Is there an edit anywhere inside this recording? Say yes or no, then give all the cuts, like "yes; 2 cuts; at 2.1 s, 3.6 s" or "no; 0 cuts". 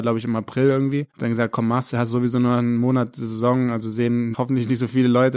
yes; 2 cuts; at 1.1 s, 4.3 s